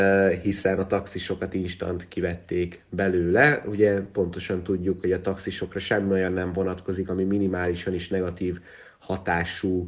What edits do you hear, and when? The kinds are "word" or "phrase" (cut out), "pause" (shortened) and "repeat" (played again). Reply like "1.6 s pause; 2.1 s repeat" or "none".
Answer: none